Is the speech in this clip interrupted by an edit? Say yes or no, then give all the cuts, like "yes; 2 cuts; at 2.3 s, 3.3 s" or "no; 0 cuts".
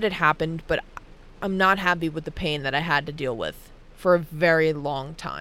no; 0 cuts